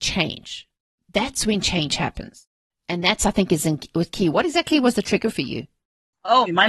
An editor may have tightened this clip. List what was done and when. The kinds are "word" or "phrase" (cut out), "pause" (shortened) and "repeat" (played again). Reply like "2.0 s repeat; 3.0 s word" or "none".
none